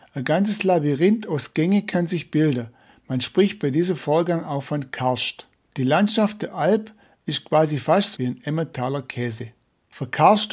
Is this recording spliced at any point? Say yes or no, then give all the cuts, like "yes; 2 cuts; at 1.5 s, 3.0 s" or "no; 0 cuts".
yes; 1 cut; at 8.2 s